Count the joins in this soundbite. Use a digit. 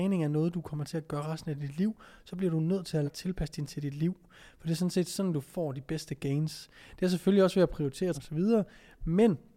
3